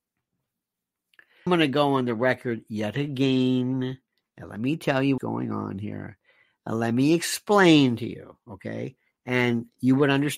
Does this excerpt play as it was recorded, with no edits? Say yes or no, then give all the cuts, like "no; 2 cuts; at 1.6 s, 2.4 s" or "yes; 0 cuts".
no; 2 cuts; at 1.5 s, 5.2 s